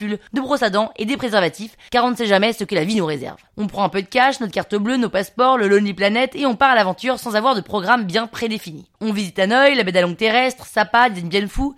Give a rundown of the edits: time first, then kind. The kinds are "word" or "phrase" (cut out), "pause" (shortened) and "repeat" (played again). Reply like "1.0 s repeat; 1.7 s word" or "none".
3.5 s pause; 8.9 s pause